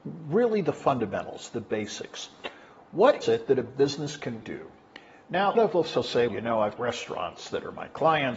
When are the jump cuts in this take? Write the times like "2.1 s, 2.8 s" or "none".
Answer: 3.2 s, 4.4 s, 5.5 s, 6.3 s, 6.8 s